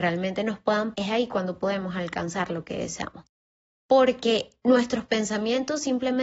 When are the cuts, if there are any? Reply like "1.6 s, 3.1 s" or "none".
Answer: 0.9 s